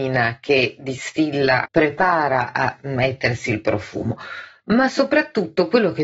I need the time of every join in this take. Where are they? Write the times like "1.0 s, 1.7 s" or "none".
1.7 s